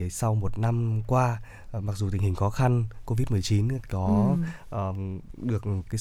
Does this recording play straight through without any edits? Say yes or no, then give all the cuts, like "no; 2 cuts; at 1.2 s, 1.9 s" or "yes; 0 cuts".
yes; 0 cuts